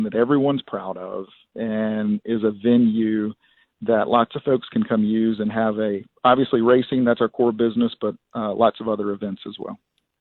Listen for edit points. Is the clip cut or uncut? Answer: uncut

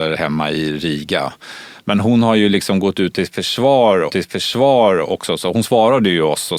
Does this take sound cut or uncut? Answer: cut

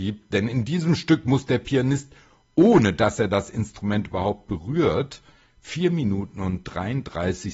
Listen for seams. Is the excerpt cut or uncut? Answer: uncut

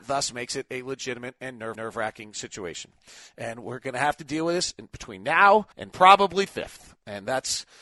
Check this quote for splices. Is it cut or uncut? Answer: cut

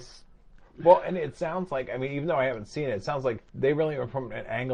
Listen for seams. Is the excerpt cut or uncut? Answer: cut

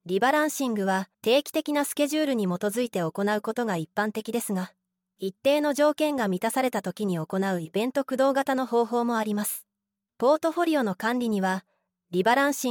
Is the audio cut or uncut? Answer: cut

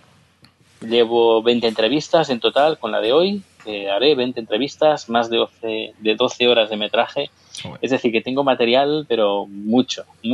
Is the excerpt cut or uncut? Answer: uncut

